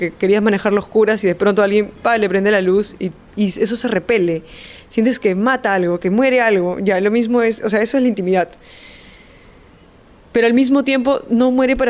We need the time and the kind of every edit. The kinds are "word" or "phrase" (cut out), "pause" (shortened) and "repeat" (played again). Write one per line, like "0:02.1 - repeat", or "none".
none